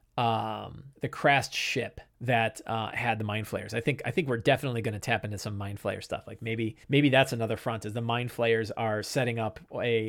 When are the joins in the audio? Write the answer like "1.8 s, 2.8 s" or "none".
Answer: 0.9 s, 2.1 s, 6.8 s